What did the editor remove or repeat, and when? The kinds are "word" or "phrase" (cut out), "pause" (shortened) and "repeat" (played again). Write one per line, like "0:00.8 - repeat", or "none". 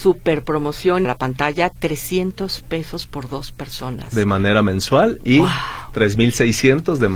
0:01.0 - phrase